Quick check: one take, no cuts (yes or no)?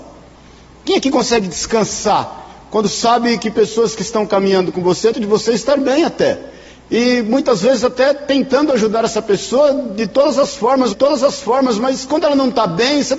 no